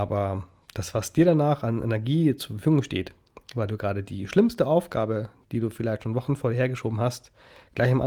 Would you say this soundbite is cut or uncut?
uncut